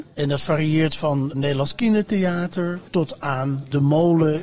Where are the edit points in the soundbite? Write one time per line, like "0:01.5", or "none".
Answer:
0:01.3
0:02.9